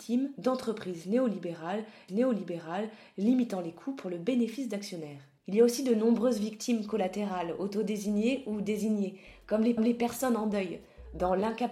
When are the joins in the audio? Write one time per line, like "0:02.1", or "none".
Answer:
0:02.1
0:05.4
0:09.8